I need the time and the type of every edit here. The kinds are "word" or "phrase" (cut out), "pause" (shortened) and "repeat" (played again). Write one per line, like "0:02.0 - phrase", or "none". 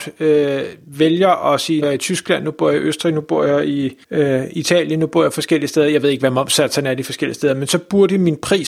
0:01.8 - phrase
0:04.0 - pause